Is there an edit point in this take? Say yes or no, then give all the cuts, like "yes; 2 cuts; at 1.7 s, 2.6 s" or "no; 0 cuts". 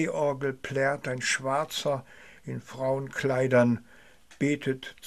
no; 0 cuts